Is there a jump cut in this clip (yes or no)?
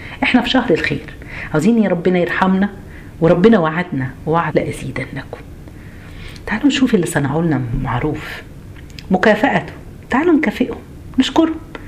yes